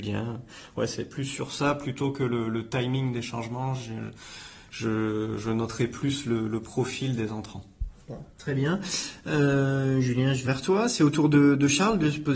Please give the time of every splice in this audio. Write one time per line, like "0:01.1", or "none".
0:10.5